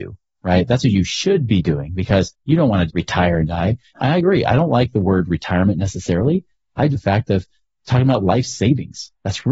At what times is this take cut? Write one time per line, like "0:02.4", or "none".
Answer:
0:02.9
0:06.9